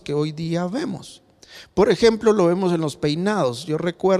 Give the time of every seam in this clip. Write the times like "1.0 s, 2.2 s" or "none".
none